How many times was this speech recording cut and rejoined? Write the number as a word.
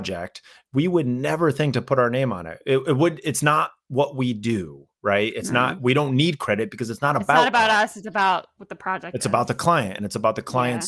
zero